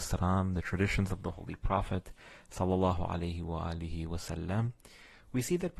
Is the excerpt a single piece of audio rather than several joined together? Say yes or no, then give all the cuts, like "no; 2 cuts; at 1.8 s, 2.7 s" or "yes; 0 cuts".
yes; 0 cuts